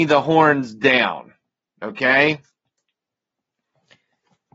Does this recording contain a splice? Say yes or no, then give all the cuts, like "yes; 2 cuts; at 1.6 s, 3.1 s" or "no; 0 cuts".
no; 0 cuts